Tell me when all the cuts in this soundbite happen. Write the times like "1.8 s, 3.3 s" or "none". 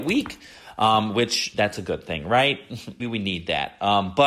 1.5 s, 3.0 s